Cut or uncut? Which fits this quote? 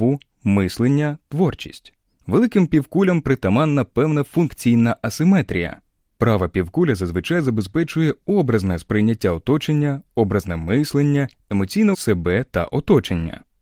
cut